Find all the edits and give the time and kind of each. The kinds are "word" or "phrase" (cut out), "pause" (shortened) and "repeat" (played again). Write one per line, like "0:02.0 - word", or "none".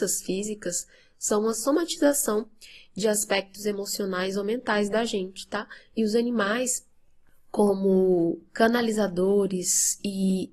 none